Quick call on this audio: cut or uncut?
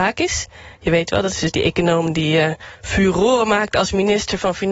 cut